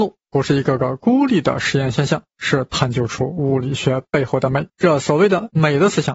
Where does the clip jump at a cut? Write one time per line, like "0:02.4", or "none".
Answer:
0:02.3
0:04.7